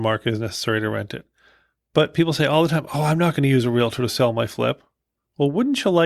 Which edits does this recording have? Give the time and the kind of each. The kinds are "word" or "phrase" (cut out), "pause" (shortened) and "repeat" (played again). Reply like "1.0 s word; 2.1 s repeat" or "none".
none